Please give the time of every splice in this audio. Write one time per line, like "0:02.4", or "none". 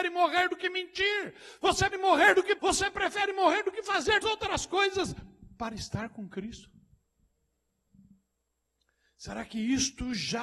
0:01.9
0:02.6
0:04.2